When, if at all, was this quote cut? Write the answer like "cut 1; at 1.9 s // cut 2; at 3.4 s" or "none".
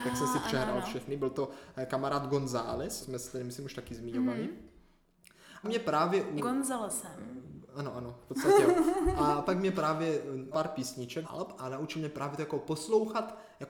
cut 1; at 3.0 s // cut 2; at 5.6 s // cut 3; at 6.4 s // cut 4; at 10.5 s // cut 5; at 11.2 s

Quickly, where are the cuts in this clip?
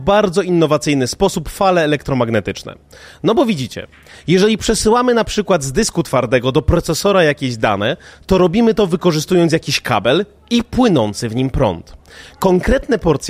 none

